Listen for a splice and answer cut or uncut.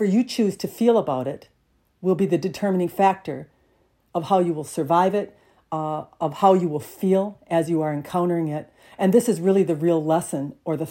uncut